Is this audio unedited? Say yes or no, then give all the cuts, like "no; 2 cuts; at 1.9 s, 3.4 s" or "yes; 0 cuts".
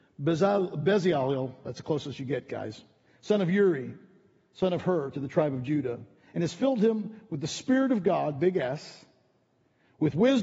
yes; 0 cuts